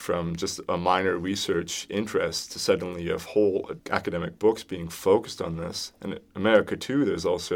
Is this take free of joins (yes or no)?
yes